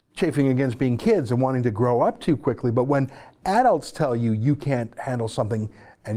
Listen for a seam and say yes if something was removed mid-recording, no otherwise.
no